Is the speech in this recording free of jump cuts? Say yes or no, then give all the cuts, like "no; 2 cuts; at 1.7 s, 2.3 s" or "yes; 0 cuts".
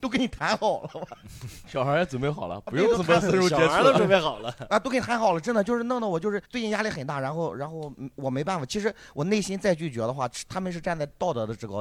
no; 1 cut; at 6.4 s